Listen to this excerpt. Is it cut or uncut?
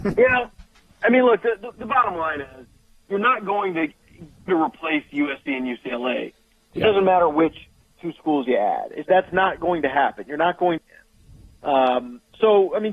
cut